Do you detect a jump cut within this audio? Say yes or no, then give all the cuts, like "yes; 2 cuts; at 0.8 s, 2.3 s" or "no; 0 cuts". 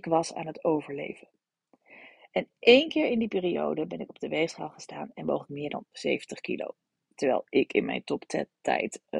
no; 0 cuts